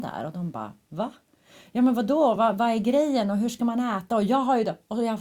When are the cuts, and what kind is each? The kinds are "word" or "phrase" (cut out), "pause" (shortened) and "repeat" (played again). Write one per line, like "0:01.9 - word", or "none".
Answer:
none